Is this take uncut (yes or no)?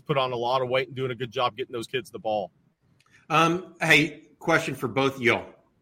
yes